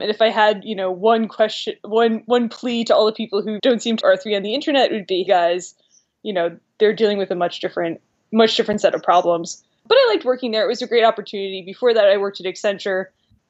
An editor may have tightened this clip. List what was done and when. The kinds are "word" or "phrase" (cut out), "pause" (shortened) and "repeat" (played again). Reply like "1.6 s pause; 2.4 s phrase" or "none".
3.6 s word; 4.0 s word; 5.3 s word